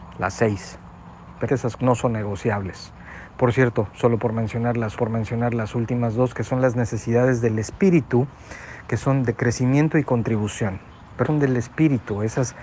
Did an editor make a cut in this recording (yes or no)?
yes